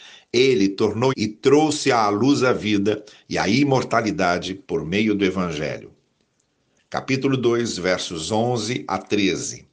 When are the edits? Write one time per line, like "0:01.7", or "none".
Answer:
0:01.1
0:04.6